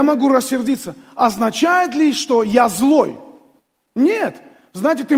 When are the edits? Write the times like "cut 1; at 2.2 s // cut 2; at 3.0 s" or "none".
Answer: none